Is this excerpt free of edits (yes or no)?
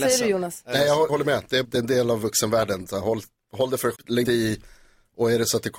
no